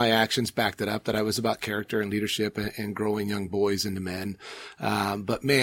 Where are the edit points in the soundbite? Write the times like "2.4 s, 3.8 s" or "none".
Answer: none